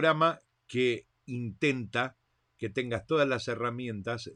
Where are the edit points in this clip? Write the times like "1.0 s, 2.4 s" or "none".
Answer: none